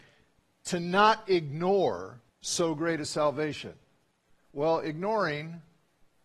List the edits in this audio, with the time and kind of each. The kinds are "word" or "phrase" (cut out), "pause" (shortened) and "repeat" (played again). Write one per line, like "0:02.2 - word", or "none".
0:02.3 - pause